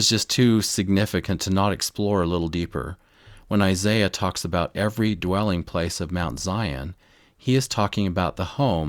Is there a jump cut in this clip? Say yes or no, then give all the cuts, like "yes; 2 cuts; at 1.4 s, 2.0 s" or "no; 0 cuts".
no; 0 cuts